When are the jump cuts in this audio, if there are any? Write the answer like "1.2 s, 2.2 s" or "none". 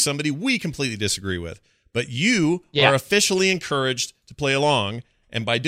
none

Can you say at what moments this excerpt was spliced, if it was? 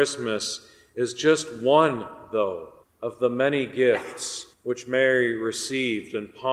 2.8 s, 4.5 s

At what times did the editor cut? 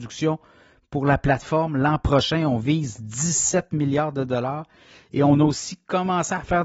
none

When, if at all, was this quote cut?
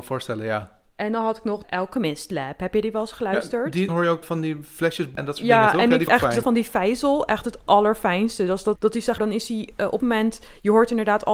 1.6 s, 3.9 s, 4.2 s, 5.2 s, 6.1 s, 6.4 s, 8.8 s, 9.2 s, 10.0 s

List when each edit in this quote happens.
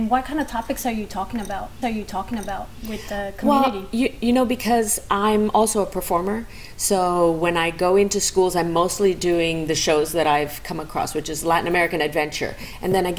1.8 s

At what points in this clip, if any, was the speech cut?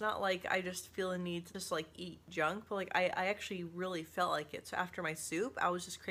none

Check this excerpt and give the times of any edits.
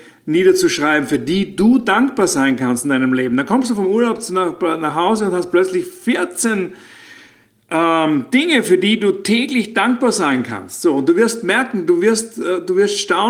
none

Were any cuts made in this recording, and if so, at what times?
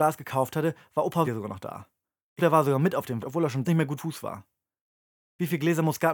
1.2 s, 2.4 s, 3.2 s, 3.6 s, 4.0 s

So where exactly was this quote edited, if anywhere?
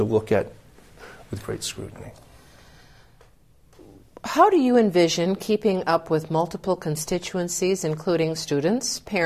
none

